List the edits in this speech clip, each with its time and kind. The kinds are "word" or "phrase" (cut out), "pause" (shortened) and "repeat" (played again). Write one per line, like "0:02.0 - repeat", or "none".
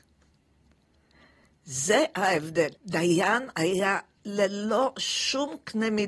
0:02.8 - pause
0:04.2 - word